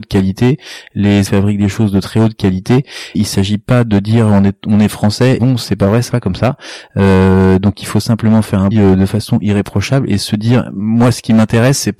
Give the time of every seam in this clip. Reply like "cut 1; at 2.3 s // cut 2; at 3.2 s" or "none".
cut 1; at 1.3 s // cut 2; at 3.1 s // cut 3; at 5.4 s // cut 4; at 6.1 s // cut 5; at 8.7 s